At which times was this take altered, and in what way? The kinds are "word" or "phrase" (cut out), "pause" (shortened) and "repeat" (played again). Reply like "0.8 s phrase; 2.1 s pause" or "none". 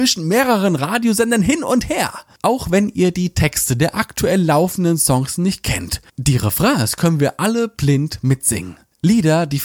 none